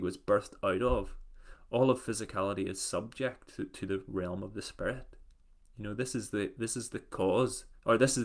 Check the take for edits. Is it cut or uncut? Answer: uncut